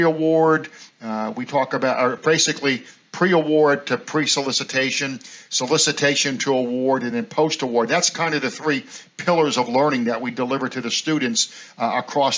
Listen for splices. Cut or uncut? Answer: uncut